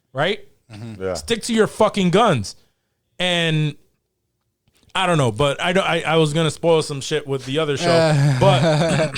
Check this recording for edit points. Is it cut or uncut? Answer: cut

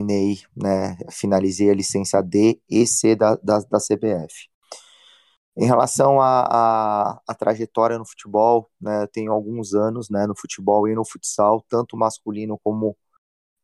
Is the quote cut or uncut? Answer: uncut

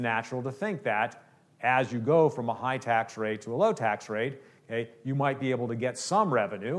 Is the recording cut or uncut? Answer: uncut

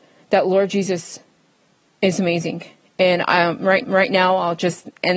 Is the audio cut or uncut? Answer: cut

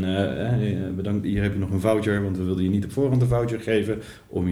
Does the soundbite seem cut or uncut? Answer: uncut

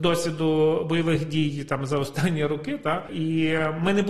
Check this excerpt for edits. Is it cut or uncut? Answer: uncut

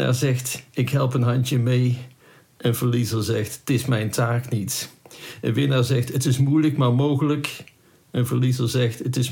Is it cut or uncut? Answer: uncut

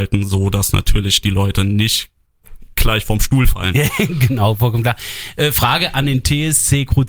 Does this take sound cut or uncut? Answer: uncut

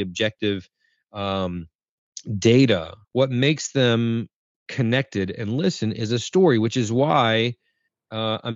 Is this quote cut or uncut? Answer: cut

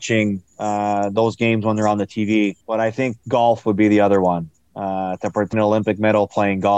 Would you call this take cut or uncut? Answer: cut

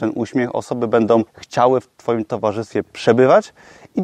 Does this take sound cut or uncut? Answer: cut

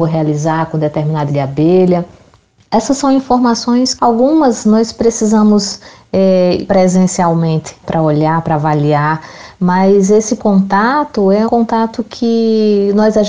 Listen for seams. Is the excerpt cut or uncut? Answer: cut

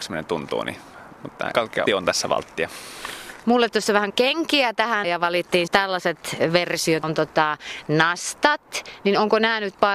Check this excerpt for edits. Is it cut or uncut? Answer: cut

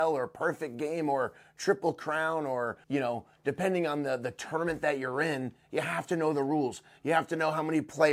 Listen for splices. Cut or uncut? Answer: cut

